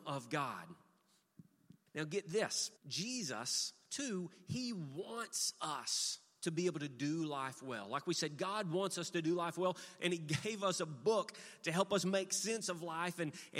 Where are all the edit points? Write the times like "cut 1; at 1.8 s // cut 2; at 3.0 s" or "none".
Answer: cut 1; at 1.9 s // cut 2; at 2.8 s